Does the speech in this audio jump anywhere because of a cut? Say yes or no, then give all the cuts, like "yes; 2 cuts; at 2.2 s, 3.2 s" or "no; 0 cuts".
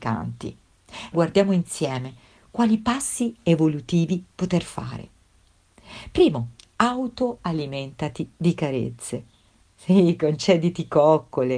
yes; 1 cut; at 1.1 s